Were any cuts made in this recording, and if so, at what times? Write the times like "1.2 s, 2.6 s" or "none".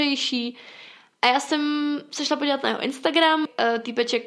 none